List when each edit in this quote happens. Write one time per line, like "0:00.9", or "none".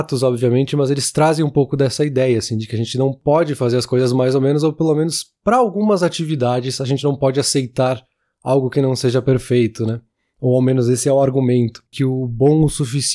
none